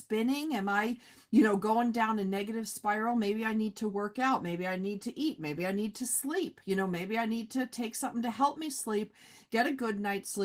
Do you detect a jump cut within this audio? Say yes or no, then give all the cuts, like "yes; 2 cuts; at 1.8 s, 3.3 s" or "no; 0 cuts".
no; 0 cuts